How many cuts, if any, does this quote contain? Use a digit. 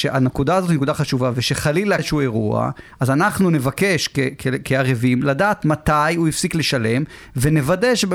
1